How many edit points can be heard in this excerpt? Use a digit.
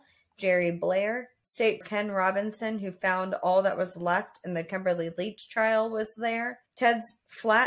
2